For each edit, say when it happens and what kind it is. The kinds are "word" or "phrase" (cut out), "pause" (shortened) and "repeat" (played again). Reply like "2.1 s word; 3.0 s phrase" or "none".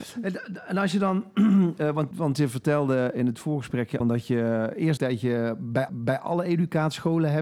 2.1 s word; 4.0 s phrase; 5.0 s word; 5.9 s repeat